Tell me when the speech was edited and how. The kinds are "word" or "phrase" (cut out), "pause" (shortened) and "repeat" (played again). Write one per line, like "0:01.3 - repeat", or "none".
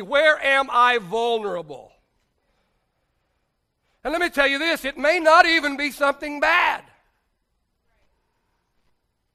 none